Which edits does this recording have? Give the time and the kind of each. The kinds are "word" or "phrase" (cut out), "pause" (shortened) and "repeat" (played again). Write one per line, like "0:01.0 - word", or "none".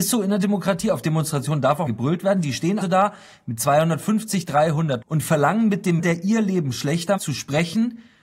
0:01.9 - word
0:02.8 - word
0:05.0 - word
0:06.0 - word
0:07.2 - word